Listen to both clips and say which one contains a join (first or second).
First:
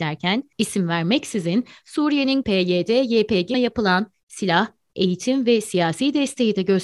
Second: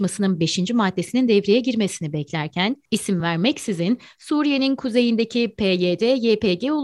first